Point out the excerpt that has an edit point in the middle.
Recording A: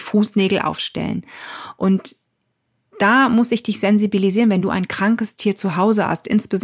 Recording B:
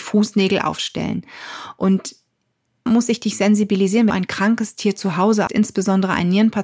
B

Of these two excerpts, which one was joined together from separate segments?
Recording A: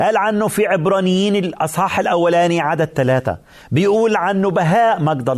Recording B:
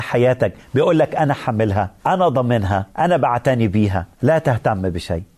B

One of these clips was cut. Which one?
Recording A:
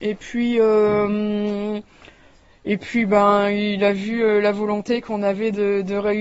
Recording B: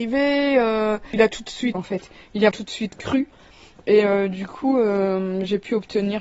B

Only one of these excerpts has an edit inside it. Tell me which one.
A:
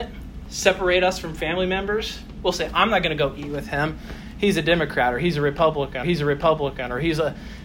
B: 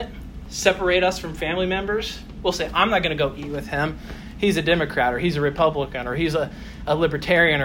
A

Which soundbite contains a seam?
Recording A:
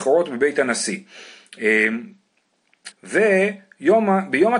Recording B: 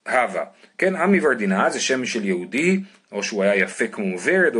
A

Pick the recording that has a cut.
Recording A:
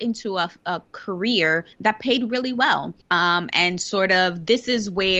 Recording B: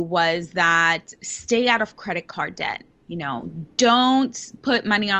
A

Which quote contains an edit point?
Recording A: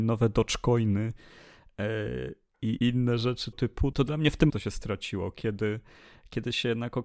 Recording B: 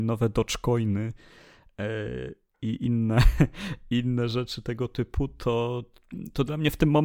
A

